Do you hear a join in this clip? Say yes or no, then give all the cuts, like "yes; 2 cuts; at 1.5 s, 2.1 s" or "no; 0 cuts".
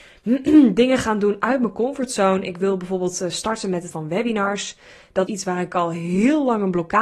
yes; 2 cuts; at 3.9 s, 5.3 s